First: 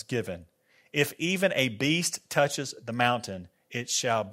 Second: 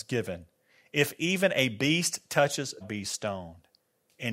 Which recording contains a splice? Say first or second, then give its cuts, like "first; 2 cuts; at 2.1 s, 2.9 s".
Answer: second; 1 cut; at 2.8 s